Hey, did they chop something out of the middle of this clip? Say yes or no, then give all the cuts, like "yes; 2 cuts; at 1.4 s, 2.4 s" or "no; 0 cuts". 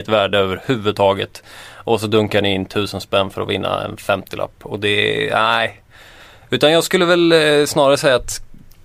no; 0 cuts